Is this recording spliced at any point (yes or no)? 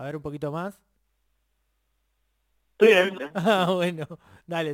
yes